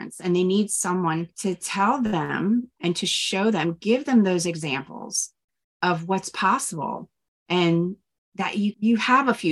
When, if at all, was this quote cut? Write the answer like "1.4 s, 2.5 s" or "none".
none